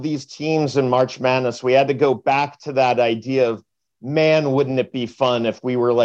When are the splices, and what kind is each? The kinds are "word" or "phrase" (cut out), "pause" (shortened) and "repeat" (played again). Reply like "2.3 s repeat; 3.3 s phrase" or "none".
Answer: none